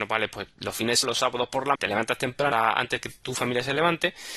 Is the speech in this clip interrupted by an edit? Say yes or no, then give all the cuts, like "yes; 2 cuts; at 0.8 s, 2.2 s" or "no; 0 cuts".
yes; 3 cuts; at 1.0 s, 1.7 s, 2.5 s